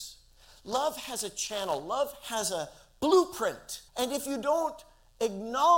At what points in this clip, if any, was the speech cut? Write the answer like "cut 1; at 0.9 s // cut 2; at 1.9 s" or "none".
cut 1; at 3.9 s